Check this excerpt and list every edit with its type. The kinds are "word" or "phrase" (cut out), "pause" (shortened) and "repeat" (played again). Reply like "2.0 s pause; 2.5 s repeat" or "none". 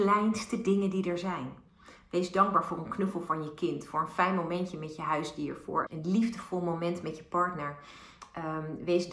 5.9 s word

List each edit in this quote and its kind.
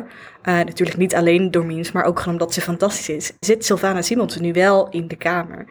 3.4 s word

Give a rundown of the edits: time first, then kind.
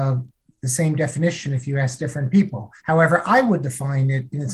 2.8 s pause

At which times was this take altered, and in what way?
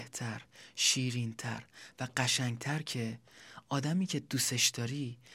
none

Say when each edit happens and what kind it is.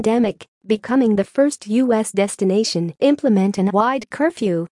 3.0 s word; 3.7 s word

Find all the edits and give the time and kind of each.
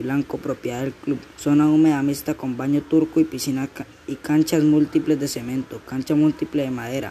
1.3 s pause

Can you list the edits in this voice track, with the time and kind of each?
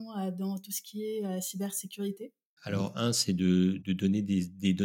none

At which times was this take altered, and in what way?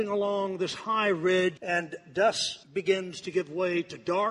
1.6 s word; 2.6 s pause

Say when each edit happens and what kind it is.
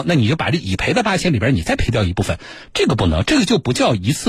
none

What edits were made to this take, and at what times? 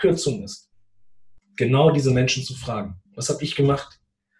3.1 s pause

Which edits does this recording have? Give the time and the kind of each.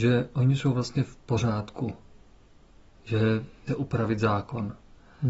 3.7 s phrase

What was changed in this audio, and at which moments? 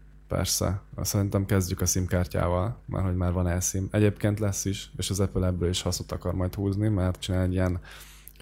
7.2 s word

